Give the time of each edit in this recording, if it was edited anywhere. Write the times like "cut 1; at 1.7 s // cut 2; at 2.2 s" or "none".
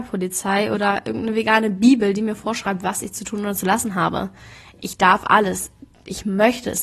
none